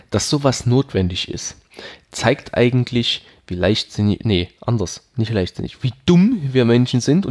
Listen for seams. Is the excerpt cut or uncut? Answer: uncut